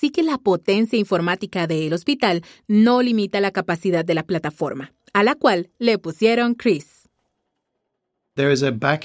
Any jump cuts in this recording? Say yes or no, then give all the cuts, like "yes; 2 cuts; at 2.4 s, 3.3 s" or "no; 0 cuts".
no; 0 cuts